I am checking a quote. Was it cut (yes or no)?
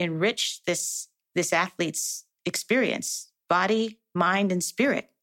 no